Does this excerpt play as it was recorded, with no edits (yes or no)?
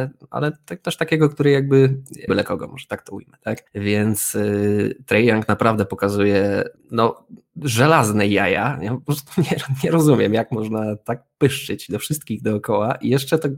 no